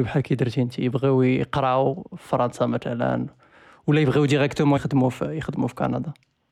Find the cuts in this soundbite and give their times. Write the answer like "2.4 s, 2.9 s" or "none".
4.8 s